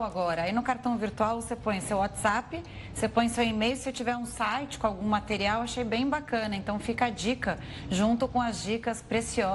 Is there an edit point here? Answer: no; 0 cuts

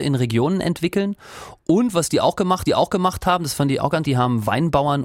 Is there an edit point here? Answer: yes; 2 cuts; at 2.7 s, 4.0 s

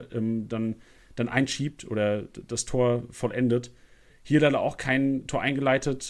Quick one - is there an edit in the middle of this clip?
no; 0 cuts

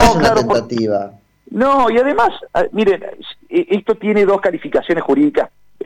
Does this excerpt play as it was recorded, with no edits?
yes; 0 cuts

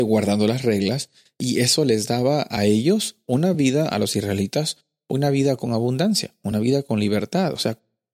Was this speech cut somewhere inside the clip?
no; 0 cuts

